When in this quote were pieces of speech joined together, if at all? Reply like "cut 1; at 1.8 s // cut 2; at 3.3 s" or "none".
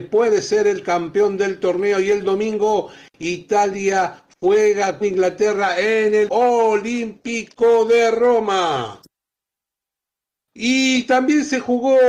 cut 1; at 5.0 s // cut 2; at 6.3 s

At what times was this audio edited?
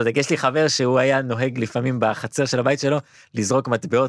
none

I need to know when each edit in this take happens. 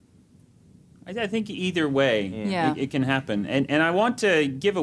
none

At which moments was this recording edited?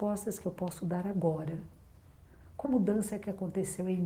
cut 1; at 2.6 s

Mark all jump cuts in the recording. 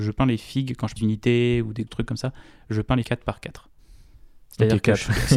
cut 1; at 1.0 s // cut 2; at 1.9 s // cut 3; at 3.0 s

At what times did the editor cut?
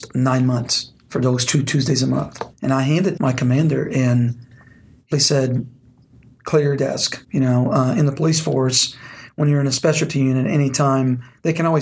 cut 1; at 2.5 s // cut 2; at 3.2 s // cut 3; at 5.1 s // cut 4; at 7.2 s

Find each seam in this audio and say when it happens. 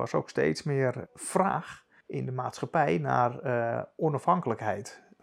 none

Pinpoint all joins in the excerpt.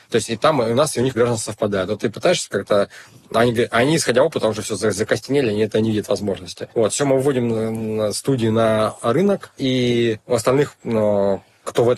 cut 1; at 1.1 s

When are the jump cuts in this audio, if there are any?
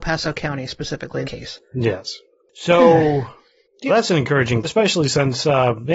cut 1; at 1.2 s // cut 2; at 3.9 s // cut 3; at 4.6 s

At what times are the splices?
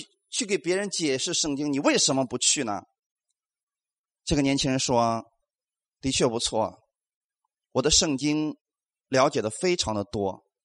none

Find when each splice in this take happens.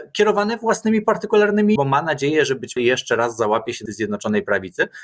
cut 1; at 1.8 s // cut 2; at 2.8 s // cut 3; at 3.9 s

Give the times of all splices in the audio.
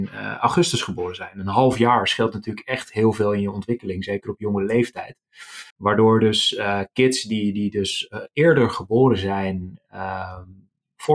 cut 1; at 5.7 s

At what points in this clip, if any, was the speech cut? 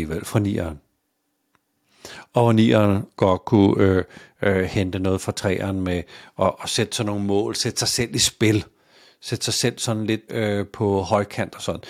cut 1; at 10.3 s

